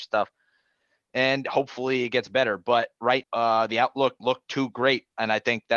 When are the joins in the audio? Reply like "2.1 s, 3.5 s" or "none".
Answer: 3.2 s, 4.2 s